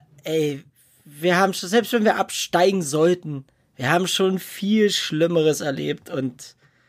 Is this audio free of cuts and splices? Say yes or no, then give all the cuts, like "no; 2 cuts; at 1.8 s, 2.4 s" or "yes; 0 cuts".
yes; 0 cuts